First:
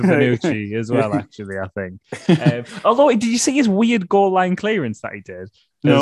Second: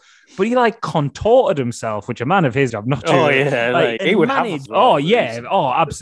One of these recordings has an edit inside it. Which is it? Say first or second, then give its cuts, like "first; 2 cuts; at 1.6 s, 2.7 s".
second; 3 cuts; at 2.7 s, 4.0 s, 4.7 s